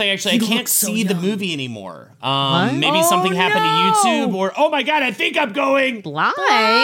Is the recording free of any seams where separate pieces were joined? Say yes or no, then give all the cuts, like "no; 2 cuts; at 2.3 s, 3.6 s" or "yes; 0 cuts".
yes; 0 cuts